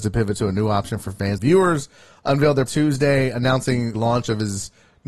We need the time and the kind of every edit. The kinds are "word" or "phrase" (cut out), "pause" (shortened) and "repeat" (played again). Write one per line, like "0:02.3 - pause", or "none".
0:01.4 - phrase
0:02.7 - word
0:03.9 - word